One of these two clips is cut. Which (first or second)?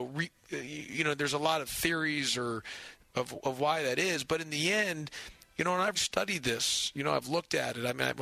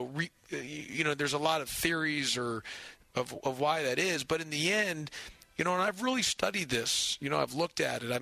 first